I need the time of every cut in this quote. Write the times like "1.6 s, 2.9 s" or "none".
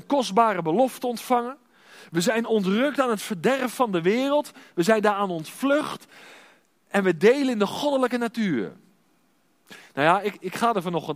none